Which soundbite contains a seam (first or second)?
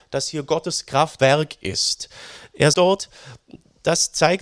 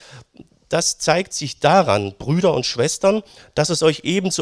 first